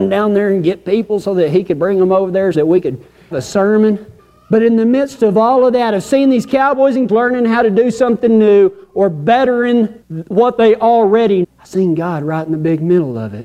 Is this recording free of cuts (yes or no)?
no